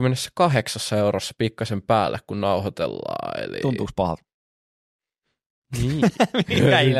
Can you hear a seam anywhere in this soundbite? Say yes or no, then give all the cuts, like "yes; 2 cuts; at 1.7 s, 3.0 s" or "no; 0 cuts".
no; 0 cuts